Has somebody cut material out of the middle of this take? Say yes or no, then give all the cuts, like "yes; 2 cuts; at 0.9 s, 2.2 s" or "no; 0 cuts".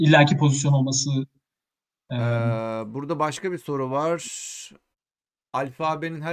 no; 0 cuts